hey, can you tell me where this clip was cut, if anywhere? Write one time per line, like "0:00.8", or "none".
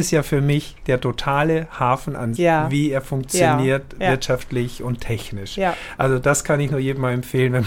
0:02.4